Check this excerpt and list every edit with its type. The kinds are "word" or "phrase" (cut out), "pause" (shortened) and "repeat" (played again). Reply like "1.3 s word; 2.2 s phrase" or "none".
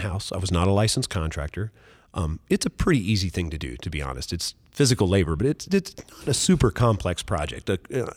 none